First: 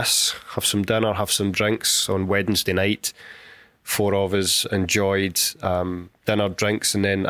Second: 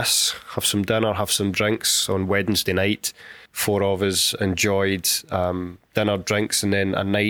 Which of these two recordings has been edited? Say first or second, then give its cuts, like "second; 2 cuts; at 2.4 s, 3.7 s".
second; 1 cut; at 3.4 s